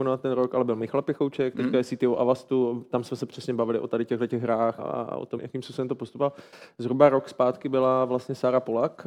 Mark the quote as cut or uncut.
cut